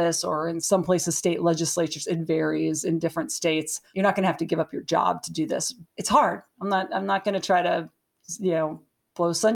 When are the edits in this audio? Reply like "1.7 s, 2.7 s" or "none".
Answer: 5.9 s